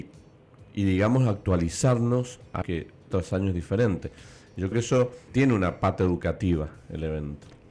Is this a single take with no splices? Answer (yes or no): no